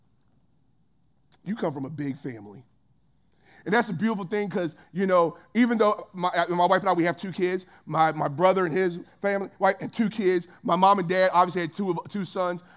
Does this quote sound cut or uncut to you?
uncut